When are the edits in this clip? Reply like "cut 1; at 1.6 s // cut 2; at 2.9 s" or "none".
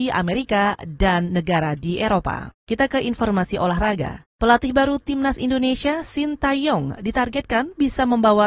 cut 1; at 2.6 s